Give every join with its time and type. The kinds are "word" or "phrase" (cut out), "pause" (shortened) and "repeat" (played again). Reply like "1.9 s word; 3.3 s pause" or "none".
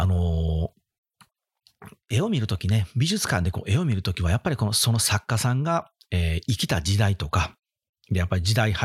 none